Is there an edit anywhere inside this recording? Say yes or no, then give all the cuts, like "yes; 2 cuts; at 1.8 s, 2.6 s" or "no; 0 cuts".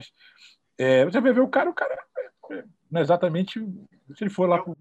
no; 0 cuts